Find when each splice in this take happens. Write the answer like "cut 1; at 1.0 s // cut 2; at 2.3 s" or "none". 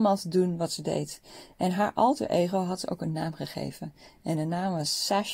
none